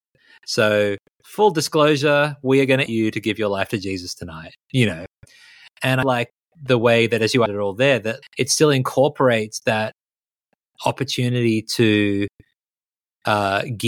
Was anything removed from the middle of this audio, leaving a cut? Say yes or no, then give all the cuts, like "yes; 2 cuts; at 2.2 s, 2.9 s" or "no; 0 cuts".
yes; 4 cuts; at 2.9 s, 6.0 s, 7.5 s, 8.2 s